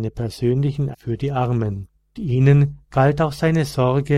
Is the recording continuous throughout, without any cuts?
no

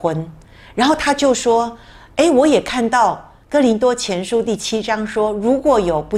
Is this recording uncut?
no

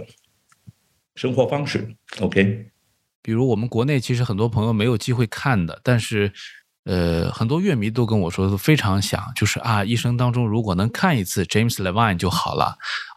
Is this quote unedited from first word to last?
yes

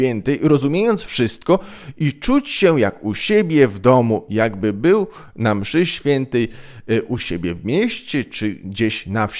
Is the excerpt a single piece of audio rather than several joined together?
yes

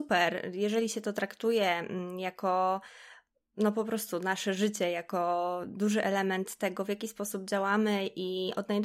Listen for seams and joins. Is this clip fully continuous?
yes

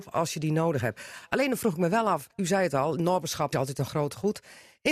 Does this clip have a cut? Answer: yes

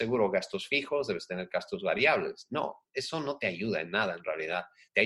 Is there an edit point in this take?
no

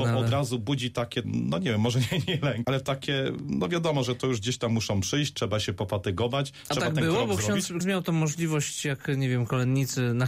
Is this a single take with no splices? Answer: no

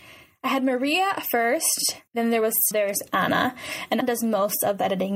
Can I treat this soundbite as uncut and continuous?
no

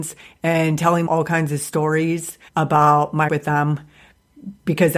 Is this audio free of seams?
no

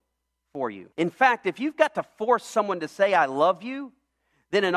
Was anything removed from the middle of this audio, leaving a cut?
yes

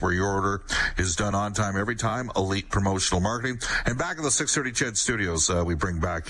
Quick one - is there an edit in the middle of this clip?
no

